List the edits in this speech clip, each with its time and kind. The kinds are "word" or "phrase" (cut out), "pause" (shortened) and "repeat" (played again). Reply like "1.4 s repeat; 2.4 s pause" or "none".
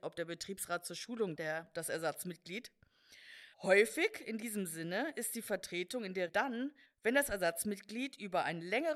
1.3 s word; 3.5 s pause; 6.3 s word; 6.8 s pause